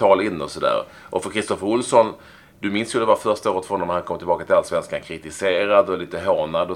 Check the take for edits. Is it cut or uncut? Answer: uncut